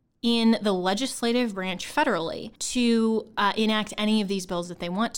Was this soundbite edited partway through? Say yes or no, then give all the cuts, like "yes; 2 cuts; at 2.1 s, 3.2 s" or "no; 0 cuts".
yes; 1 cut; at 2.6 s